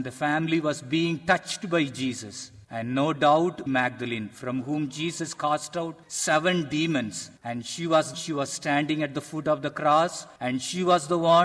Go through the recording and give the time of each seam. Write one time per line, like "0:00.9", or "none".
0:02.6
0:03.7
0:06.0
0:07.4
0:08.1
0:10.4